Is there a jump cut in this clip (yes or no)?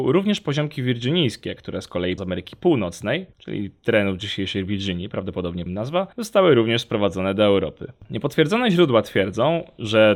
yes